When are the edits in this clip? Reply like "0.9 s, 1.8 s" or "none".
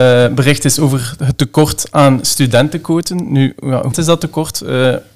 3.9 s